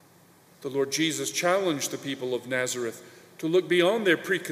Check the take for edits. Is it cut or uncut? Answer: uncut